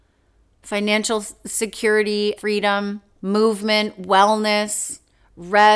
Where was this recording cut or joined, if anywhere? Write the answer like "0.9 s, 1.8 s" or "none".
2.4 s, 3.2 s